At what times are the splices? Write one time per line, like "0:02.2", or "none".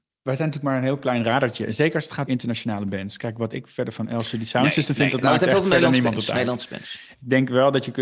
0:02.3